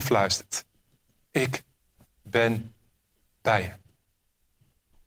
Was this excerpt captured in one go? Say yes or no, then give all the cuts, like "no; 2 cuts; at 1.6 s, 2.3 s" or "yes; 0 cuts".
yes; 0 cuts